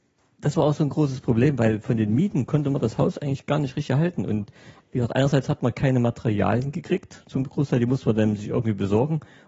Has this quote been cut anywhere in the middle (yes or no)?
no